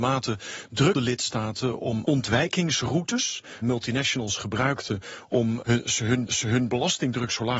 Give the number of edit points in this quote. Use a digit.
5